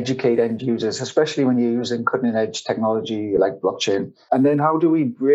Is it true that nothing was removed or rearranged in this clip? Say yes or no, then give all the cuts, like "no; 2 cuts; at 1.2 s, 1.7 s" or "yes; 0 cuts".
yes; 0 cuts